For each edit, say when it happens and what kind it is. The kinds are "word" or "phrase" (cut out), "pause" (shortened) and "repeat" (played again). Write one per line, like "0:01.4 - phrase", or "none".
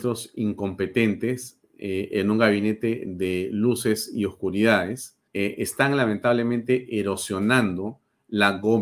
0:05.3 - pause